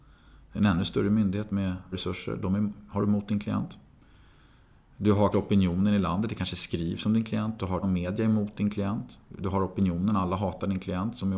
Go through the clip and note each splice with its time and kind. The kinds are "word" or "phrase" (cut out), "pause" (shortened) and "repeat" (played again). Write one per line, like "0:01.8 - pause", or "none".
0:01.9 - word
0:05.3 - word
0:07.8 - word
0:09.2 - pause